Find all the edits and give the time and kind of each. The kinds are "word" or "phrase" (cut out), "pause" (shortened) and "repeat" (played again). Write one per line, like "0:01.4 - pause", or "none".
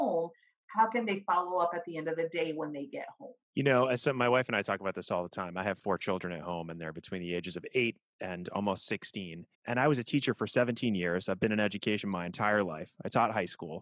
0:03.4 - pause
0:09.5 - pause